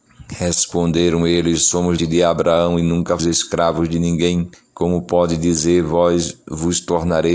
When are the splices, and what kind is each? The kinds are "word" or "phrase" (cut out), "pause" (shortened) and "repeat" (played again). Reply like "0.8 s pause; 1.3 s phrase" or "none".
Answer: 2.0 s word; 3.2 s word; 4.5 s pause